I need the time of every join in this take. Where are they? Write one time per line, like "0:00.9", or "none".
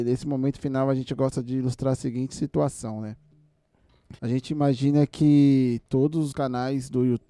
0:04.2
0:06.3